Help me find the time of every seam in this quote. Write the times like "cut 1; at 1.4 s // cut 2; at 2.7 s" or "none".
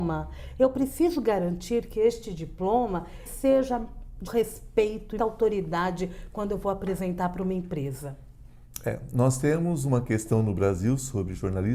cut 1; at 3.3 s // cut 2; at 4.3 s // cut 3; at 5.2 s

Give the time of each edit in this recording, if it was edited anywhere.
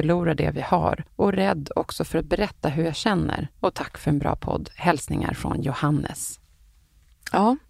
cut 1; at 1.1 s // cut 2; at 3.5 s

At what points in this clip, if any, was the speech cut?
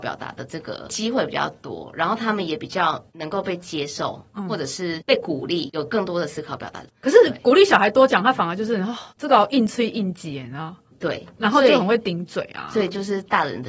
cut 1; at 3.1 s // cut 2; at 9.1 s // cut 3; at 10.9 s

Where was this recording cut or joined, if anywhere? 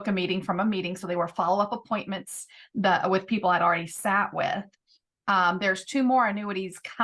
none

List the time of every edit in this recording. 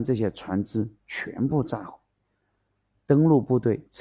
cut 1; at 1.0 s

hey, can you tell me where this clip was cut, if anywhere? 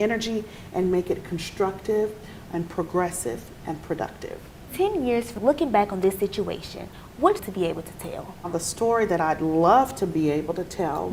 cut 1; at 5.4 s // cut 2; at 7.4 s

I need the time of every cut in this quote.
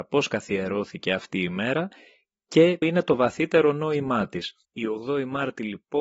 cut 1; at 2.8 s // cut 2; at 4.6 s

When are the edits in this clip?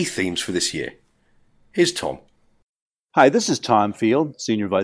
none

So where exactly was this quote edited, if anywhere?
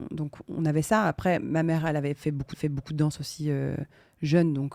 cut 1; at 2.5 s

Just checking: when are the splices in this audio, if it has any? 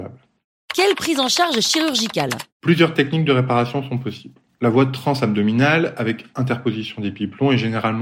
cut 1; at 2.5 s

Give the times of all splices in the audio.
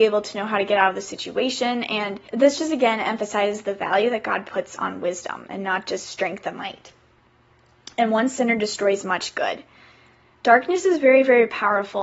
cut 1; at 2.3 s

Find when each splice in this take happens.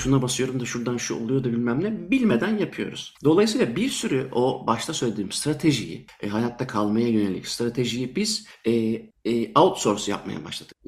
cut 1; at 3.2 s

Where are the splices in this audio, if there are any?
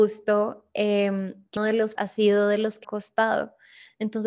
cut 1; at 1.6 s // cut 2; at 2.0 s // cut 3; at 2.8 s

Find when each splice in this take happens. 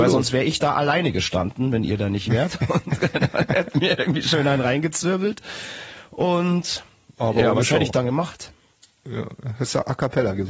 cut 1; at 2.3 s

